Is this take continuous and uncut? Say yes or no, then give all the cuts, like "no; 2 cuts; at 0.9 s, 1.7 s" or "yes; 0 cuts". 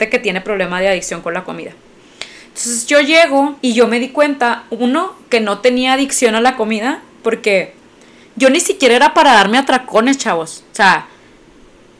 no; 1 cut; at 3.6 s